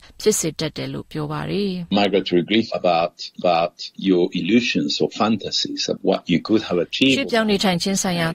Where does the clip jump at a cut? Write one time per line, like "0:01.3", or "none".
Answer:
0:01.9
0:03.4
0:06.0